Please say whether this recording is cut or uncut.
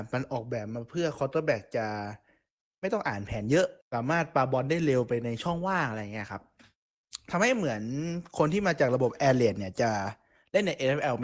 cut